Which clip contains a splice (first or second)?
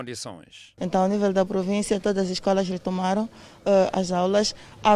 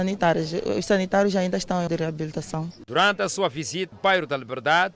second